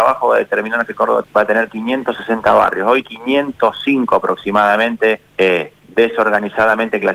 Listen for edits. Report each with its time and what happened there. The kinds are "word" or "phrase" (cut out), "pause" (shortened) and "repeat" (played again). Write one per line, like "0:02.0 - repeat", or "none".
0:01.2 - word
0:03.0 - word
0:05.3 - pause